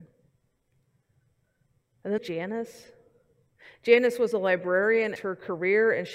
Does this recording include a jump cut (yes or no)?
yes